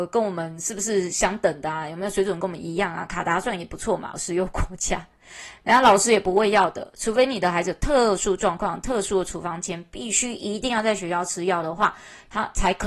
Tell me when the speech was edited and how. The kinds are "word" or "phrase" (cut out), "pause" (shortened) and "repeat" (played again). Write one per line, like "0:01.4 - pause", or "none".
0:04.1 - word